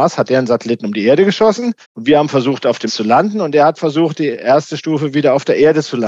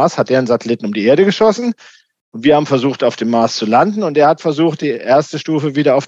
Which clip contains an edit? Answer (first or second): first